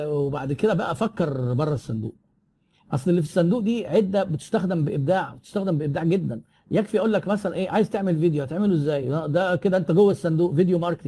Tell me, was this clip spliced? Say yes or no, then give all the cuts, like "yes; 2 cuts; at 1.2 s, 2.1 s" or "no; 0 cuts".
no; 0 cuts